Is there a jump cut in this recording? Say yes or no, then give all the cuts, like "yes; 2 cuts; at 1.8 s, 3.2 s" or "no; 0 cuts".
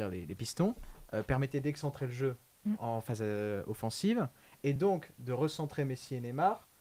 no; 0 cuts